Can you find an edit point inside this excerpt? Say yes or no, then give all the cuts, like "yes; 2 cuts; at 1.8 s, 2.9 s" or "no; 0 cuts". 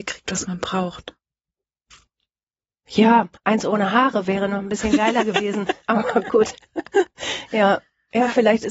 yes; 2 cuts; at 3.4 s, 5.8 s